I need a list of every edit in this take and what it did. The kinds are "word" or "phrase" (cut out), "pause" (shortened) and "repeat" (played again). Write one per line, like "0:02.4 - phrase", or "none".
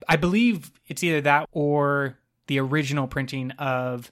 0:01.4 - word